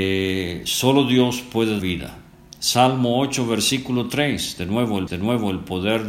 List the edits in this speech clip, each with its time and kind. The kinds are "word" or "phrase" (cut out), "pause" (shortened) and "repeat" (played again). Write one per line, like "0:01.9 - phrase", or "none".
0:01.8 - word
0:05.1 - repeat